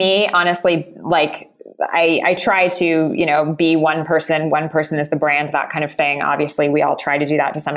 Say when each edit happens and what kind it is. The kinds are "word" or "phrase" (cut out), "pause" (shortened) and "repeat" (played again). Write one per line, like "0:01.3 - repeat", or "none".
none